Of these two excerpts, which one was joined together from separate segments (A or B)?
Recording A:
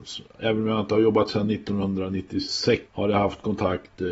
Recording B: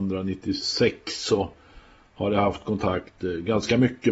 A